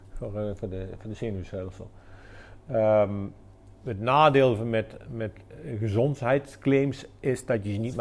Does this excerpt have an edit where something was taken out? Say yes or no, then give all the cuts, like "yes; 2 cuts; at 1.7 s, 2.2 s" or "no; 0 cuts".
no; 0 cuts